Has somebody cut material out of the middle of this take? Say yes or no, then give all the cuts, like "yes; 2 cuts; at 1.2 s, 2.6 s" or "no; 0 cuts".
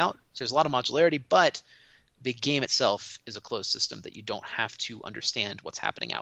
no; 0 cuts